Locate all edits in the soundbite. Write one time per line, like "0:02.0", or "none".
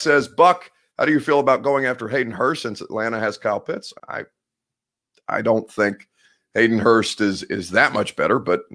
0:04.0

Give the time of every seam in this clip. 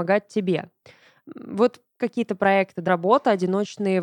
0:02.0
0:02.9

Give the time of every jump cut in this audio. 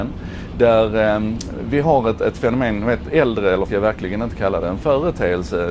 0:03.7

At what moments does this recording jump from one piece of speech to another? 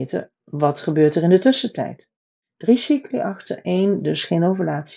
none

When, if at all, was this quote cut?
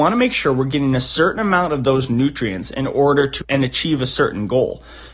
0:03.4

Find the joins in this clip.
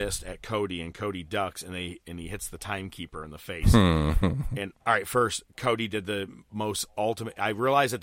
0:04.8

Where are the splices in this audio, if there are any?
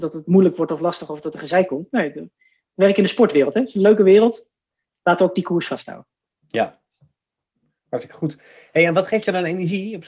none

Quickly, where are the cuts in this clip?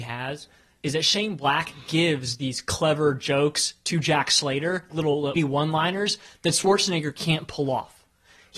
0:04.9
0:05.4

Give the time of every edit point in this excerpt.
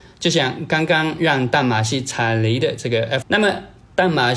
0:03.2

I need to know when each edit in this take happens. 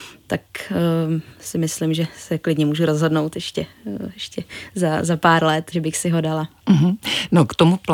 0:01.3
0:05.7

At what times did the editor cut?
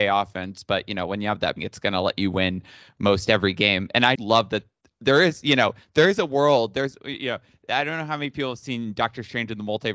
0:01.6
0:04.2

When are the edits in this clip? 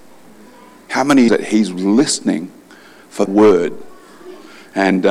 0:01.3
0:03.3

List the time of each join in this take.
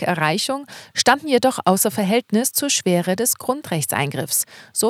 none

